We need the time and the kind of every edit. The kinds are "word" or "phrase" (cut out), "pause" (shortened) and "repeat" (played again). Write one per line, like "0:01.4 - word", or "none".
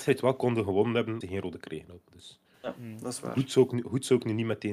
0:01.2 - word
0:01.6 - word